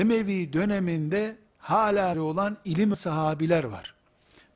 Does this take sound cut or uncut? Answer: cut